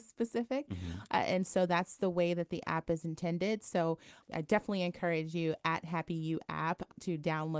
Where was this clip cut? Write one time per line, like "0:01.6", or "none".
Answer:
0:04.2